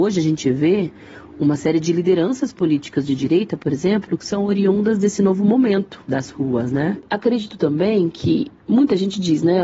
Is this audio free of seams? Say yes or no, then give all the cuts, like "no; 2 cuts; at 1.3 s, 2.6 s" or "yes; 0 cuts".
no; 2 cuts; at 6.0 s, 8.6 s